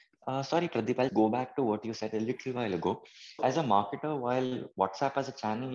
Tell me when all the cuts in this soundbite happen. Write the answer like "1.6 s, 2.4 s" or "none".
1.1 s, 3.4 s